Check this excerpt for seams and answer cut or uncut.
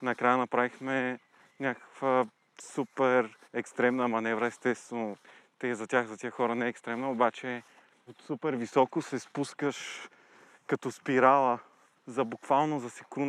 cut